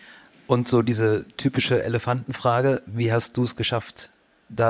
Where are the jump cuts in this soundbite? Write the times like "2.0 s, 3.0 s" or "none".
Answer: none